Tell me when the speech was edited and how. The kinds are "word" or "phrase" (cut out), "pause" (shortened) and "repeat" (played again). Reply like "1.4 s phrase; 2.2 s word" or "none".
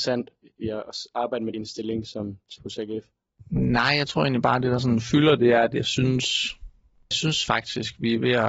1.5 s word; 2.6 s word; 7.1 s word